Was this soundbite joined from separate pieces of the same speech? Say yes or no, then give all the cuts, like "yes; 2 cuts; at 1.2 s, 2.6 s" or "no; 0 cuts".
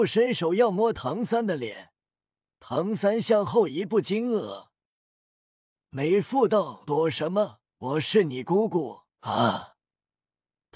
yes; 2 cuts; at 7.7 s, 9.1 s